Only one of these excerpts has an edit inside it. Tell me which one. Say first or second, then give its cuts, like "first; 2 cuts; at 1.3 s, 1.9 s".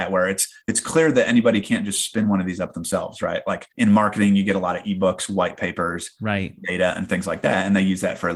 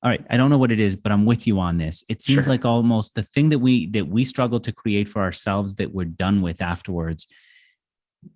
first; 1 cut; at 3.7 s